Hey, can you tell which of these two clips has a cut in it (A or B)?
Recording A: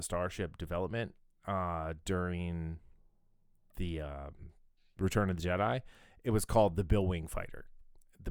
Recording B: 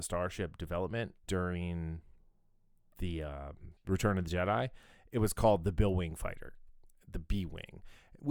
B